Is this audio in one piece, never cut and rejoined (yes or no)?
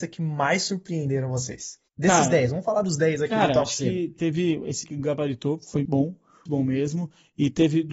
no